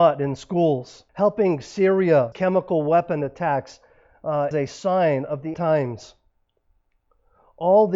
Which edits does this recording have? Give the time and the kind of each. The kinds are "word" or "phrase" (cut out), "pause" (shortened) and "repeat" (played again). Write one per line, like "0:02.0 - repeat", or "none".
0:01.1 - pause
0:02.3 - word
0:04.5 - word
0:05.5 - word